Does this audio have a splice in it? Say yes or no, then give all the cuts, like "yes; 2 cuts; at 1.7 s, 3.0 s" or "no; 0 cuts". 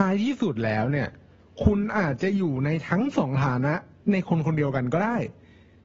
no; 0 cuts